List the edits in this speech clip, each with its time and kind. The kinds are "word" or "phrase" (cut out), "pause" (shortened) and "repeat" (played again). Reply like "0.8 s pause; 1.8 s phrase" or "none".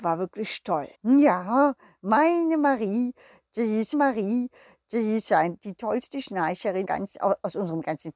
0.9 s pause; 3.9 s repeat; 6.8 s phrase